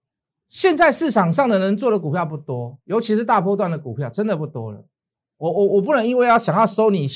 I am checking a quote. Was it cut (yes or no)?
no